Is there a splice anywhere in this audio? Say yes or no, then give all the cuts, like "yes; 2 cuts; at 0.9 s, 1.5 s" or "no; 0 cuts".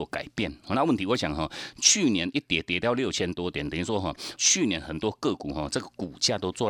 yes; 1 cut; at 4.4 s